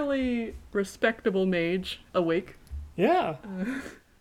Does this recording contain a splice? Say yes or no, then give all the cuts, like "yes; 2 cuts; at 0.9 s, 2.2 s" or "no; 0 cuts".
yes; 1 cut; at 2.1 s